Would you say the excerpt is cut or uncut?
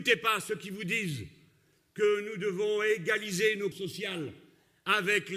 cut